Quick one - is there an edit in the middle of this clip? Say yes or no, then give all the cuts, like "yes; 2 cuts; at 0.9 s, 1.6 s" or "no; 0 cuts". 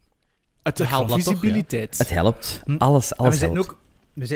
yes; 1 cut; at 1.1 s